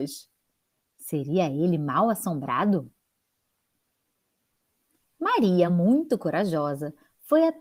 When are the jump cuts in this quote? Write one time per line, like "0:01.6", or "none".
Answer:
none